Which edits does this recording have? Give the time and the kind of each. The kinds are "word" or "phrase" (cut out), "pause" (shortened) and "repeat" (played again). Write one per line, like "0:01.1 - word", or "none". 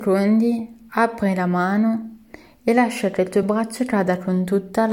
none